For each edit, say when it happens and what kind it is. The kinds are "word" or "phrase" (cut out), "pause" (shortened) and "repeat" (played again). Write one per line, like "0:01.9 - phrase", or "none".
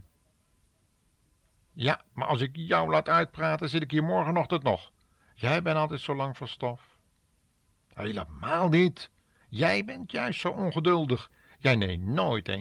none